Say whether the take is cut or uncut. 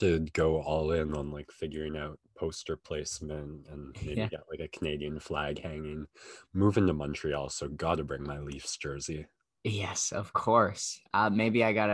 uncut